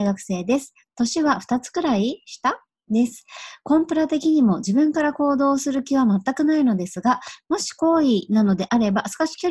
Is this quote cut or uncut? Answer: uncut